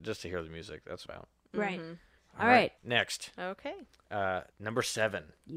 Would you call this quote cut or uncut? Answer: cut